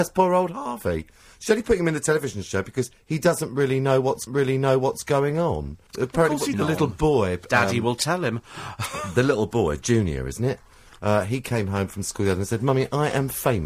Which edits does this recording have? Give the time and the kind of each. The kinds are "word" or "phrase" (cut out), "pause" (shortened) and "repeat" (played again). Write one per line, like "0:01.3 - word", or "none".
0:04.3 - repeat
0:05.9 - pause
0:06.5 - phrase